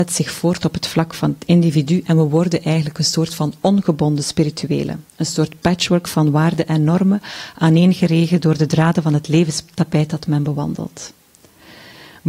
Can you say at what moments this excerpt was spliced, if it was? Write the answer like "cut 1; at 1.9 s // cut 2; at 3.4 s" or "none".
cut 1; at 5.1 s